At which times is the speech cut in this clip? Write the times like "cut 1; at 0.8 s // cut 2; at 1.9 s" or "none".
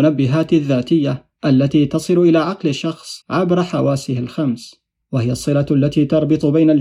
cut 1; at 3.2 s